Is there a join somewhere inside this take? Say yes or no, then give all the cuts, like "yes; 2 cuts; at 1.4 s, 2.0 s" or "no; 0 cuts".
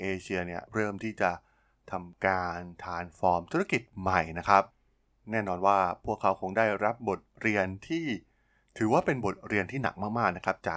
no; 0 cuts